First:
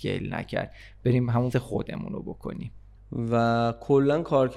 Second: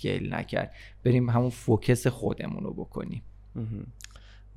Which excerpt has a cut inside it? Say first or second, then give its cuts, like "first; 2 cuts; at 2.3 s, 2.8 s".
first; 2 cuts; at 1.5 s, 3.0 s